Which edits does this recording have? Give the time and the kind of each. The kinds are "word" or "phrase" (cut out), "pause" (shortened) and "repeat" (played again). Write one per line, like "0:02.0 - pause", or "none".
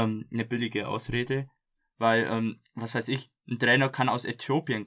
none